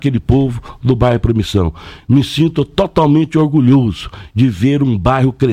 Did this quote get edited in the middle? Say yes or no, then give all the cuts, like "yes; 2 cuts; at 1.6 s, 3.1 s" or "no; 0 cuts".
no; 0 cuts